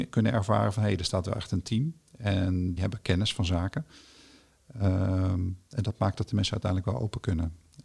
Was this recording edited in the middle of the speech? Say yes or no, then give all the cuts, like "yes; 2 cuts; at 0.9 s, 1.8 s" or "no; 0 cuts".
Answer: yes; 1 cut; at 2.8 s